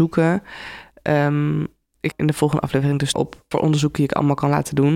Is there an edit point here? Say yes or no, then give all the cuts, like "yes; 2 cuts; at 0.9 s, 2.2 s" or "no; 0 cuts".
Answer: yes; 3 cuts; at 2.1 s, 3.1 s, 3.5 s